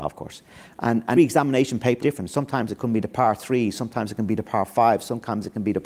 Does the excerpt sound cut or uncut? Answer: cut